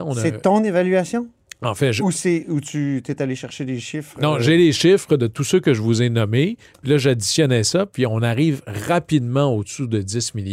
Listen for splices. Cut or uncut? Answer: uncut